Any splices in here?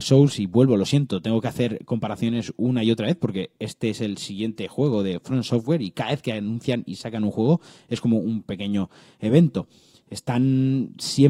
no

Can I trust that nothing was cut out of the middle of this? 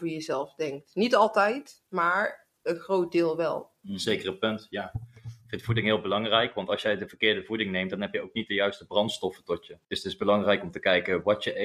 no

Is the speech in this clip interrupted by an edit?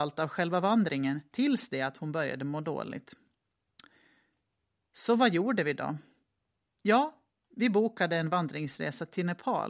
no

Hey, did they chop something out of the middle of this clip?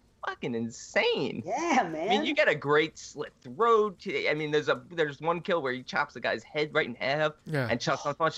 no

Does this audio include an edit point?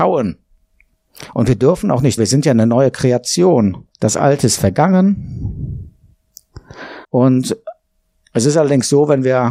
yes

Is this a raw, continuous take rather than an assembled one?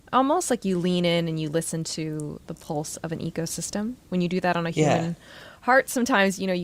yes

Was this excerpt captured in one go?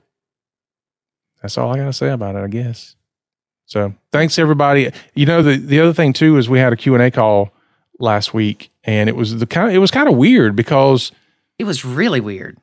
yes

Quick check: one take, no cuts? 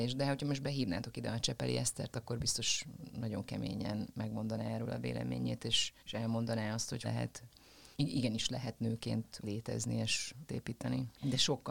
no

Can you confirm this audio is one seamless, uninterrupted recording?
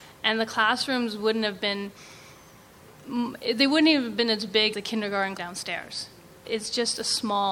no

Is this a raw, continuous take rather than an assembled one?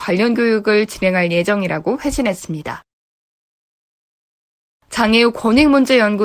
yes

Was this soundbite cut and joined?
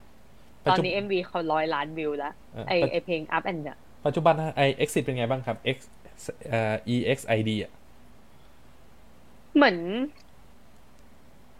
yes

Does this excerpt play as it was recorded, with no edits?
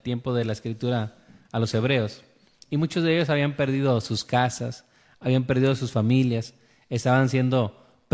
yes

